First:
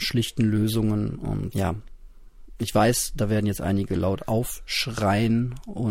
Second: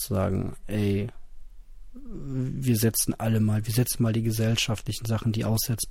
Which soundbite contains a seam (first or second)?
first